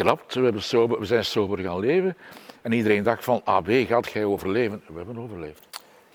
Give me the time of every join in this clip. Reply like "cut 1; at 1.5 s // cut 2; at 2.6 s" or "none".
none